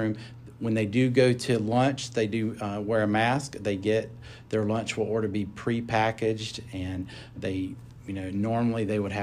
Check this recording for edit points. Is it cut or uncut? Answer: cut